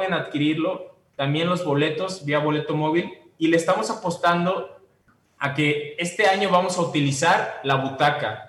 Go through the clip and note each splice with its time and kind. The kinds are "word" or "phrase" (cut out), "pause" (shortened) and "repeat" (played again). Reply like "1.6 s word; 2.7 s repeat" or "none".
none